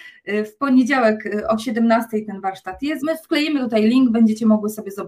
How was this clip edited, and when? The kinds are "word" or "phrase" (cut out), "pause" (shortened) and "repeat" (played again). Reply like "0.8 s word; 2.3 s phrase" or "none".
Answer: 3.0 s word